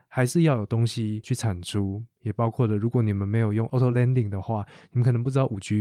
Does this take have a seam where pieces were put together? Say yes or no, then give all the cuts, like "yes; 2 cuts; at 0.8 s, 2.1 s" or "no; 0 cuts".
no; 0 cuts